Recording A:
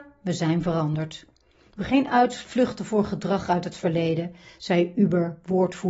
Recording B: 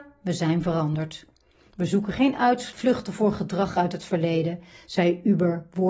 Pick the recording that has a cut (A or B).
A